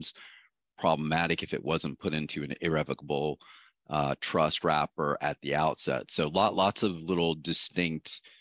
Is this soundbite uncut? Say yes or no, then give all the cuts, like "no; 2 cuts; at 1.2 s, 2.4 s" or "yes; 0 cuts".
yes; 0 cuts